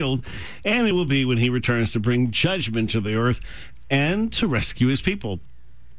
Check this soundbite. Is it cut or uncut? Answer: uncut